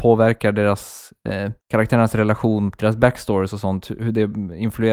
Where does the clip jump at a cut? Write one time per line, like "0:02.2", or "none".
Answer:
0:01.6
0:02.8

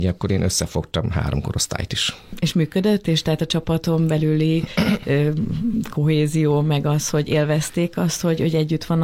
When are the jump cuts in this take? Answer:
none

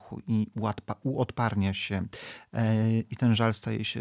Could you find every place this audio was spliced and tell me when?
none

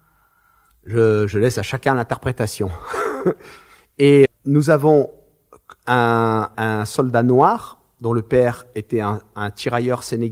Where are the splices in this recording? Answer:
0:04.3
0:06.5

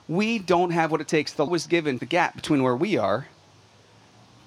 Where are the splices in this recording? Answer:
0:01.5
0:02.0

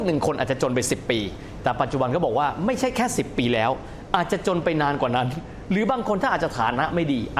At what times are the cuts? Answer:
none

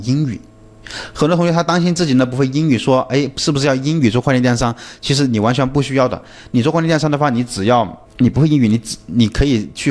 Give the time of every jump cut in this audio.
0:08.1

